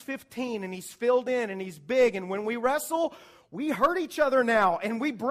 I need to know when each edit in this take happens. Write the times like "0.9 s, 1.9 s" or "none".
none